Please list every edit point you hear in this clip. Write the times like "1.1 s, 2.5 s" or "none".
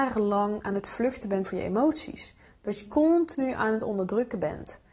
1.4 s, 2.8 s